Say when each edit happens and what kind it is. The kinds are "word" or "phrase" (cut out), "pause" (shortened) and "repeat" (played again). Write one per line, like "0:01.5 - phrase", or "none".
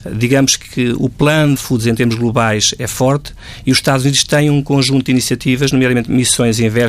0:01.6 - phrase